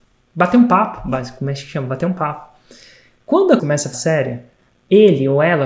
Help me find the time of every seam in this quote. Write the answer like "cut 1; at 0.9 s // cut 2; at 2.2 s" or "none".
cut 1; at 3.6 s // cut 2; at 3.9 s